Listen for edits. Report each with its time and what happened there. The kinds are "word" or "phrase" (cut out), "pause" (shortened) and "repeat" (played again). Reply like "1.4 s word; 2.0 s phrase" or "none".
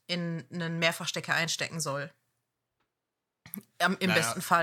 none